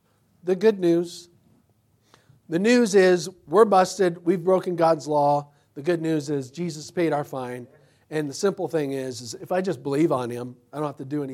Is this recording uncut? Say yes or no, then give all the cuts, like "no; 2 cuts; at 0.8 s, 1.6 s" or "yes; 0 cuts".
yes; 0 cuts